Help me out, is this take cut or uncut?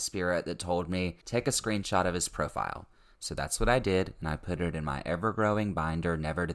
uncut